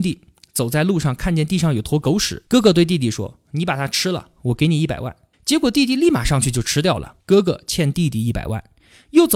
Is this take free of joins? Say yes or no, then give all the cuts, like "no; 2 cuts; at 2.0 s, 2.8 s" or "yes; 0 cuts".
no; 3 cuts; at 2.5 s, 5.3 s, 7.2 s